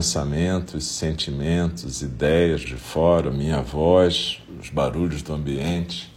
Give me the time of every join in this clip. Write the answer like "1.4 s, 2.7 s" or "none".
2.7 s, 3.3 s